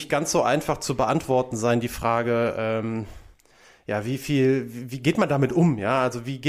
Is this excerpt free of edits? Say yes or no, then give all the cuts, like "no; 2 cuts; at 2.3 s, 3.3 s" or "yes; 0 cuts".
yes; 0 cuts